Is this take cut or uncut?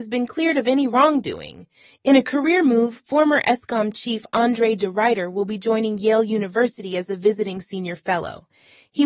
uncut